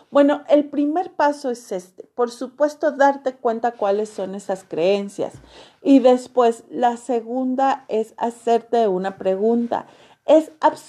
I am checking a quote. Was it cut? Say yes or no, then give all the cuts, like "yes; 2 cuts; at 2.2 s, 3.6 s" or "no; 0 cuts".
no; 0 cuts